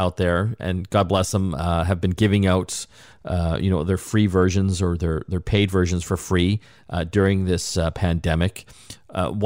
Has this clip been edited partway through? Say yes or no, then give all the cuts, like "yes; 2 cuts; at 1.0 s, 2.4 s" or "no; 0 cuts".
no; 0 cuts